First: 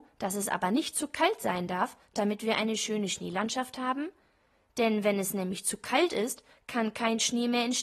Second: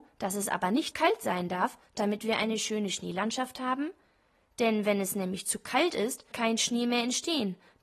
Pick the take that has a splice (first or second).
second